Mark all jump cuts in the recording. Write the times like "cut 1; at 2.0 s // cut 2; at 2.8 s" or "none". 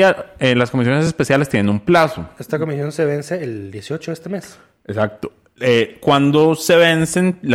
none